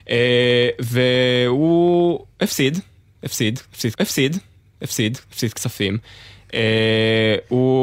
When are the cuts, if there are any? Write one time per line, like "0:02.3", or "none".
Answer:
0:04.0

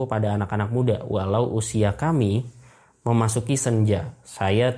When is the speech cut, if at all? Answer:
none

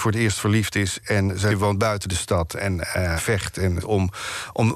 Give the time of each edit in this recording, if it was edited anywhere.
0:01.5
0:03.2
0:03.8

